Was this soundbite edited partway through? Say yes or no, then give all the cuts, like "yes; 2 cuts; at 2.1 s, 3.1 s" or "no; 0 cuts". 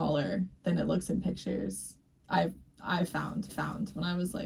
yes; 1 cut; at 3.5 s